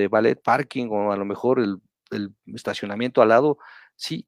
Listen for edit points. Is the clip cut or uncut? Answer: uncut